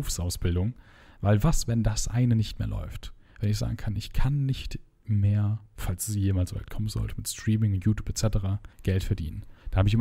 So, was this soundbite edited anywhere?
yes; 2 cuts; at 5.7 s, 8.7 s

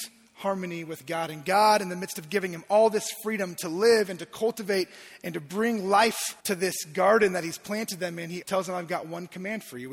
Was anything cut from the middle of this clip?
yes; 2 cuts; at 6.4 s, 8.4 s

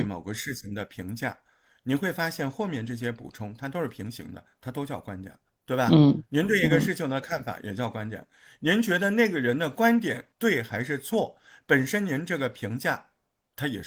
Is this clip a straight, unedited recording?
no; 2 cuts; at 5.5 s, 10.3 s

